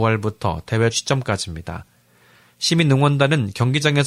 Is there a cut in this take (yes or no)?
yes